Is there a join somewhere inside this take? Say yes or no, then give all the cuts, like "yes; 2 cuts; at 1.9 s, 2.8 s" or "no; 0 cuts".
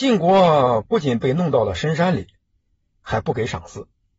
no; 0 cuts